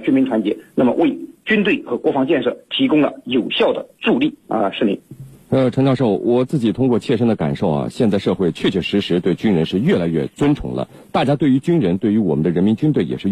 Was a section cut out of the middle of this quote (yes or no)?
yes